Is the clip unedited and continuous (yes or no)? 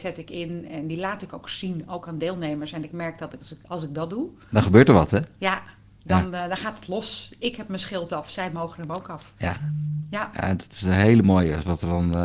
yes